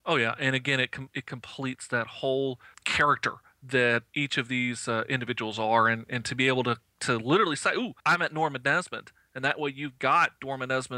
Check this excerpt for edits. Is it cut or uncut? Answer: cut